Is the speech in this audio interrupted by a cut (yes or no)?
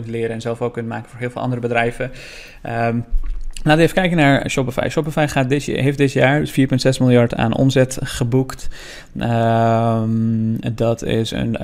no